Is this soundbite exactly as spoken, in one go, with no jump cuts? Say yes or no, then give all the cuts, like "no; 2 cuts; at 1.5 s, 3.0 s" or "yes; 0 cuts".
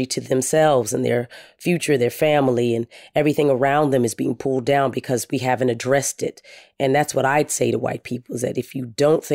yes; 0 cuts